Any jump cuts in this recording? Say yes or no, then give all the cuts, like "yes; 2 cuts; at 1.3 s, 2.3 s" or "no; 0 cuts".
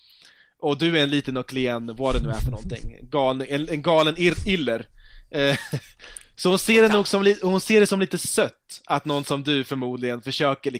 no; 0 cuts